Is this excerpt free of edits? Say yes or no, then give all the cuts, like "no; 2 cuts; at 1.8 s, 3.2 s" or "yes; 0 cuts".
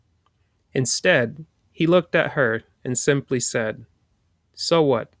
yes; 0 cuts